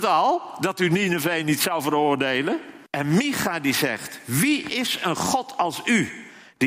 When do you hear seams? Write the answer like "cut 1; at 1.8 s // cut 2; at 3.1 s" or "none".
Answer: cut 1; at 2.9 s

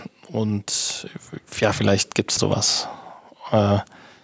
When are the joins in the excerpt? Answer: cut 1; at 2.4 s

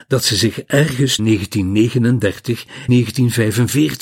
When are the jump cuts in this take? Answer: cut 1; at 1.2 s // cut 2; at 2.9 s

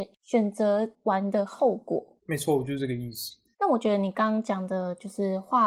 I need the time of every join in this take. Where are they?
cut 1; at 2.2 s // cut 2; at 3.5 s

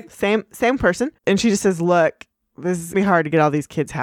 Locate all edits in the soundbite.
cut 1; at 1.2 s // cut 2; at 2.9 s

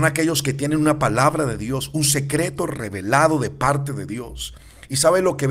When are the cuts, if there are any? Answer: none

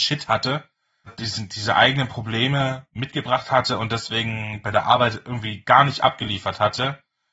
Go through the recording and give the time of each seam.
cut 1; at 1.1 s

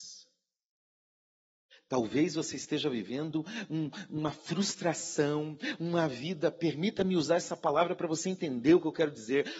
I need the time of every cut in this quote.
none

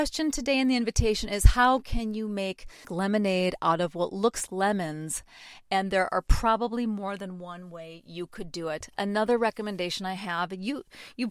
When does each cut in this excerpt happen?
cut 1; at 4.5 s

